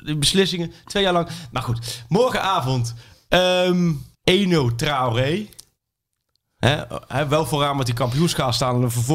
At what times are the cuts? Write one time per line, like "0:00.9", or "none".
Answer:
0:04.1